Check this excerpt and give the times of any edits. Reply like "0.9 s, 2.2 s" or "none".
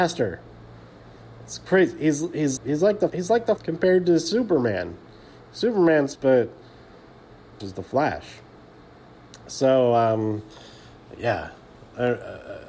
2.6 s, 3.1 s, 3.6 s, 6.1 s, 7.6 s